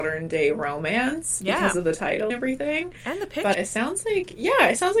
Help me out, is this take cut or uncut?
cut